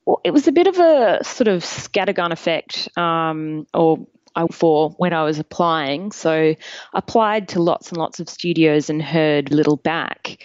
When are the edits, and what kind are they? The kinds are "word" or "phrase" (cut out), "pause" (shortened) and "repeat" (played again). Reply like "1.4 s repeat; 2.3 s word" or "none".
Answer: 3.7 s pause; 4.5 s word; 9.5 s word

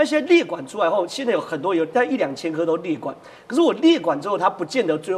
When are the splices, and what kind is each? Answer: none

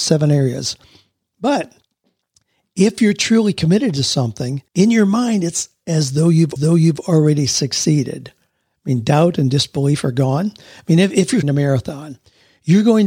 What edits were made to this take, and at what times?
4.7 s pause; 6.6 s repeat; 11.4 s phrase

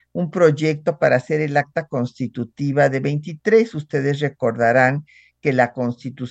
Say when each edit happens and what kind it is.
none

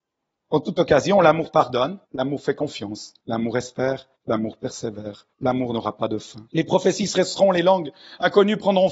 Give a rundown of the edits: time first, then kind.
2.0 s pause; 3.2 s pause; 4.2 s pause; 5.3 s pause; 6.5 s pause

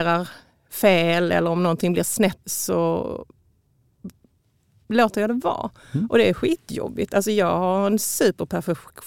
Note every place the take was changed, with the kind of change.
2.4 s word

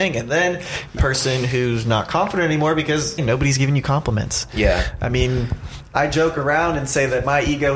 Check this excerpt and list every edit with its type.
1.0 s phrase; 3.2 s word

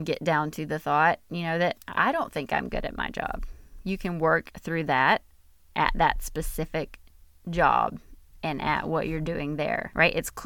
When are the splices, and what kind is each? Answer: none

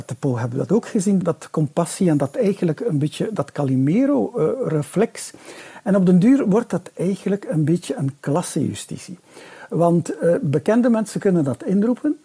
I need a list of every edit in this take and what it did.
1.2 s word

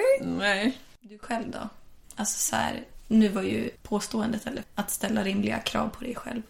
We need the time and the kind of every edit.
2.0 s pause; 3.7 s word; 4.6 s word

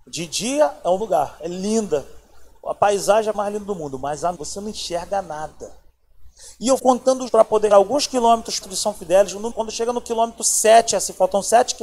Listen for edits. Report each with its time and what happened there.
1.0 s word; 3.3 s word; 4.3 s word; 6.8 s word; 7.3 s word; 7.7 s word; 8.6 s word; 9.5 s word

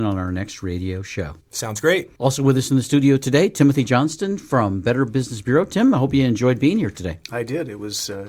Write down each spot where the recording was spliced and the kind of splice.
1.4 s pause; 2.2 s pause

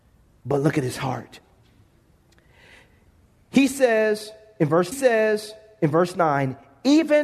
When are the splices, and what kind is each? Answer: 4.9 s repeat

